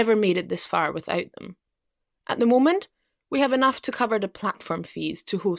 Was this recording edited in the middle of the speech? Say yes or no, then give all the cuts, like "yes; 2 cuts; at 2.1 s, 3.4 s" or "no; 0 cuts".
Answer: no; 0 cuts